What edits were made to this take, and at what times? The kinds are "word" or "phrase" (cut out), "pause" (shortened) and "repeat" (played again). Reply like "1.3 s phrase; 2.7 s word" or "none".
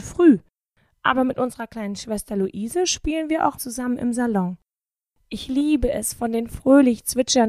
3.6 s word